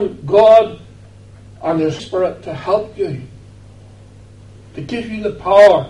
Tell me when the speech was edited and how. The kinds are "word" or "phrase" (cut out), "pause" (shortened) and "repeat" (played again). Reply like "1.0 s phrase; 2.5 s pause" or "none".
2.0 s word